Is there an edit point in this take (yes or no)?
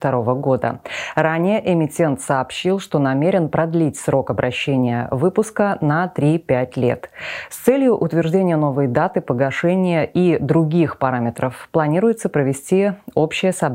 no